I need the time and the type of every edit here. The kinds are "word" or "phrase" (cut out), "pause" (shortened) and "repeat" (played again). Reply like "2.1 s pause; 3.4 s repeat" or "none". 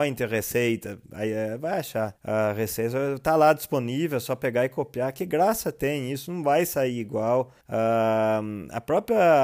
1.1 s pause; 2.2 s pause; 7.6 s pause